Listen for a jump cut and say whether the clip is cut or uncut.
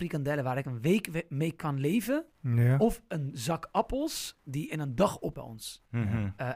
cut